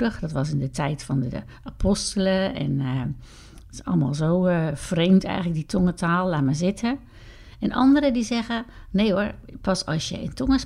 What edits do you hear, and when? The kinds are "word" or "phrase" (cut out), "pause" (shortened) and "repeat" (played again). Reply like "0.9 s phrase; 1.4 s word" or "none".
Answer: none